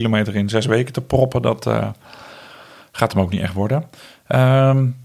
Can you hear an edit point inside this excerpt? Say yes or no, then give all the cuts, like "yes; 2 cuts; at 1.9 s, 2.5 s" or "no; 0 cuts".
no; 0 cuts